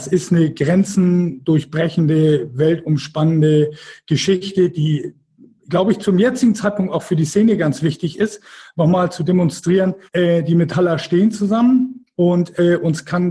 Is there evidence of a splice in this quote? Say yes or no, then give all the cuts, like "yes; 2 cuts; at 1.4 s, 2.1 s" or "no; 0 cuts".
yes; 1 cut; at 10.1 s